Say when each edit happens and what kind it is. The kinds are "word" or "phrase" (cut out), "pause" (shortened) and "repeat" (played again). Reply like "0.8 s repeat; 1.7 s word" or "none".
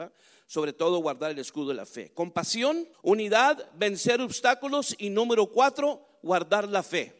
2.9 s pause